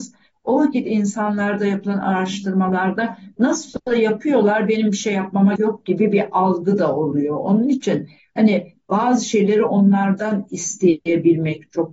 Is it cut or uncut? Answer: cut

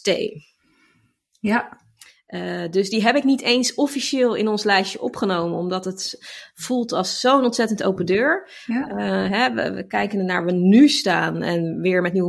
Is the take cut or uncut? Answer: uncut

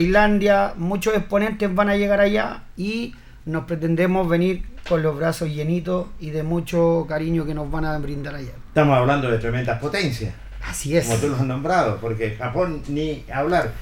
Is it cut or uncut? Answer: uncut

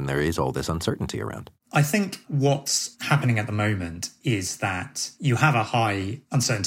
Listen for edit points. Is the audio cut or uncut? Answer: uncut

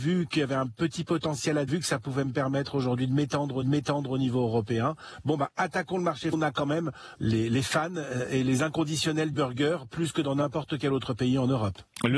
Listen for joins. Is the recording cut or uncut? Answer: cut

